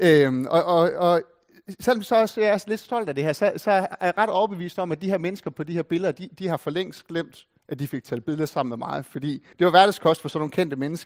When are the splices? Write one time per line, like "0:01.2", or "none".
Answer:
0:09.5